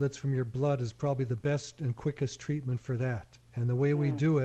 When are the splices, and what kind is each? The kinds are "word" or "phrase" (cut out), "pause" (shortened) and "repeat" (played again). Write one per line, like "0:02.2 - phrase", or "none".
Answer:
0:03.5 - pause